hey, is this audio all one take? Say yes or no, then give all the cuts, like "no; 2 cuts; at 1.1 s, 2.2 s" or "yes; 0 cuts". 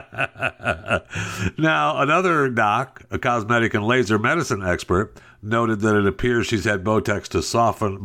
yes; 0 cuts